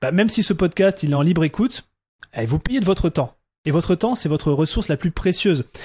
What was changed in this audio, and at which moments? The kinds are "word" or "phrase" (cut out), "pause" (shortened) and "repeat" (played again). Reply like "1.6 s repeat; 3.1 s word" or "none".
none